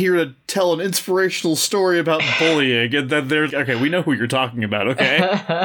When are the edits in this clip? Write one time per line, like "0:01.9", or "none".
0:03.5